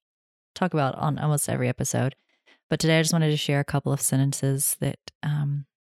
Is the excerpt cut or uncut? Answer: uncut